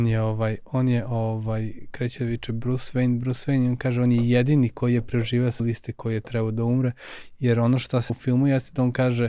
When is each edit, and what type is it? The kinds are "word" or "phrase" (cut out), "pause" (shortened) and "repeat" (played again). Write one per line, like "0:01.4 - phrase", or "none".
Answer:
0:05.6 - word
0:08.1 - word